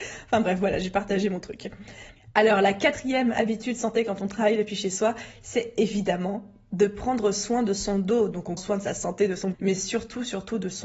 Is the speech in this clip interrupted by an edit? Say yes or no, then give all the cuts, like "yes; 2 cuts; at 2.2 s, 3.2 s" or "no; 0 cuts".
yes; 2 cuts; at 8.6 s, 9.5 s